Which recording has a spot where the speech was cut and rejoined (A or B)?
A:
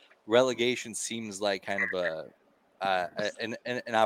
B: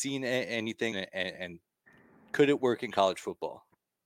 B